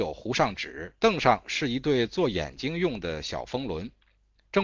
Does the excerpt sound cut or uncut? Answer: cut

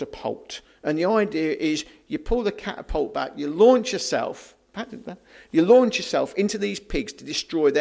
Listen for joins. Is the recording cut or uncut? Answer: uncut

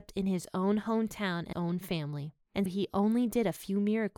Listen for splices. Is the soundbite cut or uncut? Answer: cut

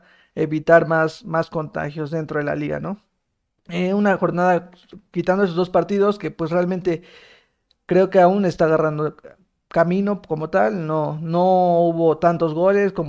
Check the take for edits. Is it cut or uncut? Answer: uncut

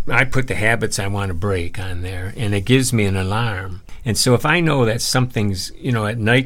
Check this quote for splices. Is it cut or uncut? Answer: uncut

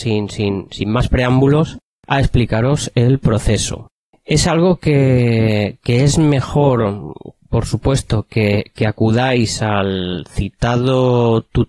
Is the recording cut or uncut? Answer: uncut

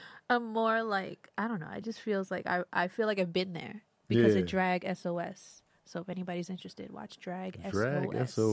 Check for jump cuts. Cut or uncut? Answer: uncut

